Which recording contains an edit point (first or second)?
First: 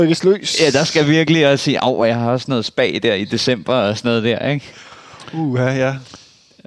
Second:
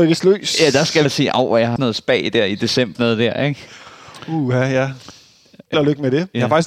second